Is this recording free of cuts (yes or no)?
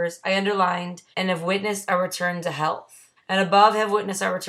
no